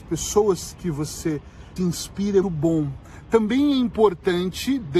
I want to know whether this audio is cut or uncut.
cut